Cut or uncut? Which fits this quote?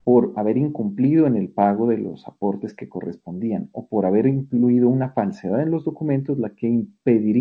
uncut